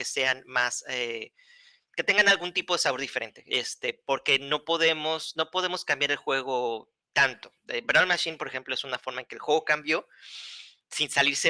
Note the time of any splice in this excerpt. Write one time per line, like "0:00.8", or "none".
none